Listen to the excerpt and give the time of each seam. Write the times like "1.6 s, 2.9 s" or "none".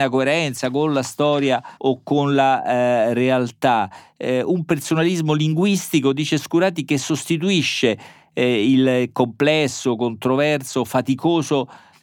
1.8 s